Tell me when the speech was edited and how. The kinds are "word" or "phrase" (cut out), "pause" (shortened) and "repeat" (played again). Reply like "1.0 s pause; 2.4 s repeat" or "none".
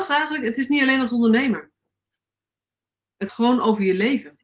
3.3 s word